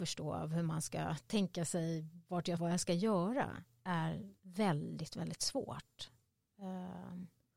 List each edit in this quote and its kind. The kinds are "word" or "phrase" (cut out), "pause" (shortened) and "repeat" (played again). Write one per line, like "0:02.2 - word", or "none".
0:02.6 - phrase
0:04.4 - pause